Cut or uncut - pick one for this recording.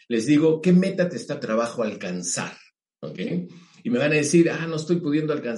cut